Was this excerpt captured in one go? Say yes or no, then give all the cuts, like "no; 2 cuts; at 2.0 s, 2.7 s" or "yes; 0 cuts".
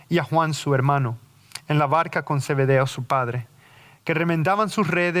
yes; 0 cuts